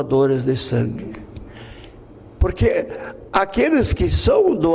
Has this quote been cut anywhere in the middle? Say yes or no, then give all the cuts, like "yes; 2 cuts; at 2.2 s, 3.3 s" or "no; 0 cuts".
no; 0 cuts